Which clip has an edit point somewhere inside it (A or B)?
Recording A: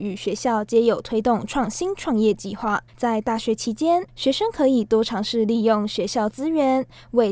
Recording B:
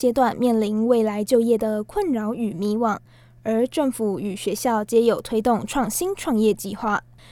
A